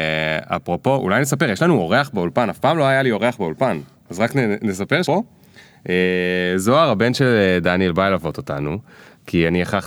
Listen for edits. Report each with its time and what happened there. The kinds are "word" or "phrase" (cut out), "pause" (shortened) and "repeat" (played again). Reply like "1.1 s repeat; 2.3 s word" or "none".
5.0 s word